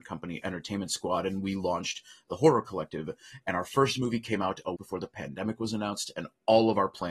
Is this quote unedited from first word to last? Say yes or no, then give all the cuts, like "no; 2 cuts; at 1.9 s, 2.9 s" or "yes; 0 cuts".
no; 1 cut; at 4.8 s